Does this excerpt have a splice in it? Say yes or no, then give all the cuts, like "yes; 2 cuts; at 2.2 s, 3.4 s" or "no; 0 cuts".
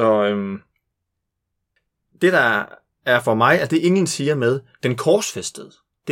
no; 0 cuts